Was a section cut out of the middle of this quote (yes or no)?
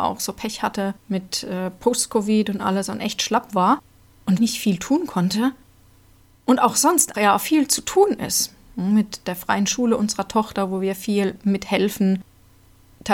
yes